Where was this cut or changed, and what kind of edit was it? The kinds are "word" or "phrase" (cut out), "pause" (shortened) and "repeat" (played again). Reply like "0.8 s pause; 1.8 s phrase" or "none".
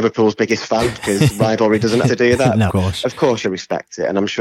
2.0 s phrase; 2.7 s word; 3.4 s phrase

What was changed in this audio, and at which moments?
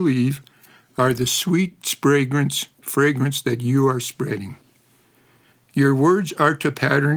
none

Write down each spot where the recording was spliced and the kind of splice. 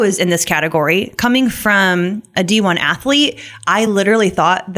none

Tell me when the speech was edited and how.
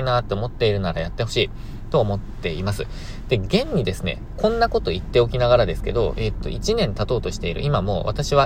none

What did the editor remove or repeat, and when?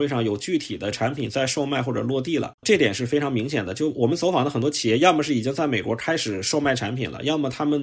2.6 s pause

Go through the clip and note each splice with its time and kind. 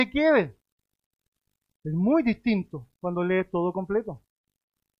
none

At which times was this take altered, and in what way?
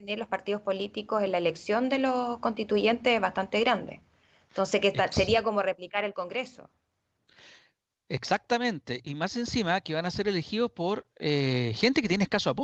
9.0 s word

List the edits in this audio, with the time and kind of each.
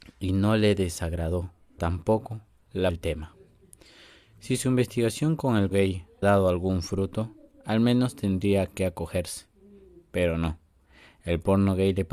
1.8 s word; 2.9 s word; 5.7 s word; 6.2 s word

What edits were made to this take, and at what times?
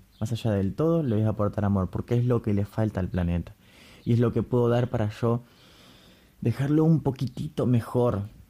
none

